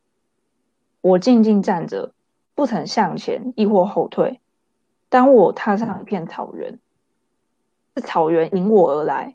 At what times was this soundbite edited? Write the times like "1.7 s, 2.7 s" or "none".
none